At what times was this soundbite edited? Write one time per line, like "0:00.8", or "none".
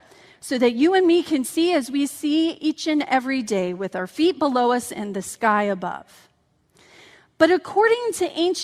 none

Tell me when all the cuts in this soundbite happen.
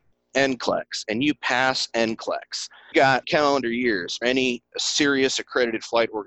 0:02.9
0:03.2
0:04.2

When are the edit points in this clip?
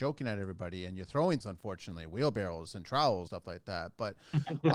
0:01.4
0:03.3

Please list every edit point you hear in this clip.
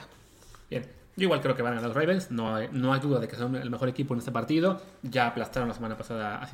none

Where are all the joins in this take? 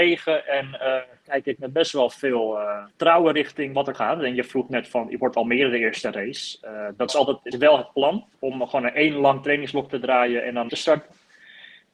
0:02.9
0:03.9
0:07.1
0:07.5
0:08.3
0:10.7

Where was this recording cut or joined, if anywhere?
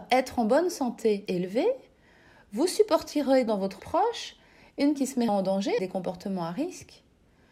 0:01.3
0:03.5
0:03.8
0:05.0
0:05.3
0:05.8

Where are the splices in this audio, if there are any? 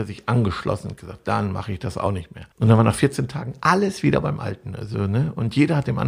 0:02.5

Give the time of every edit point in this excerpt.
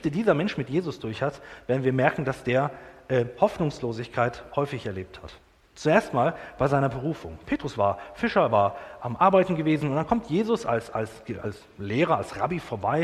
0:05.6

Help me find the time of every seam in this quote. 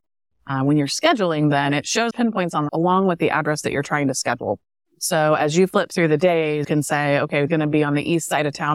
0:02.1
0:02.7
0:06.6
0:07.5

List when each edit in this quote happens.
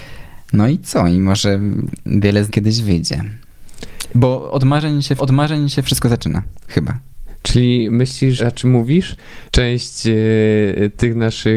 0:02.5
0:05.2
0:08.4
0:09.5

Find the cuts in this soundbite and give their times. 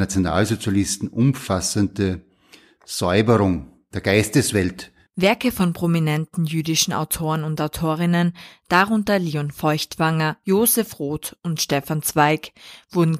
none

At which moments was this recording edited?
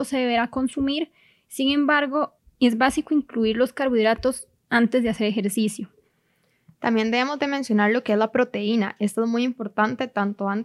none

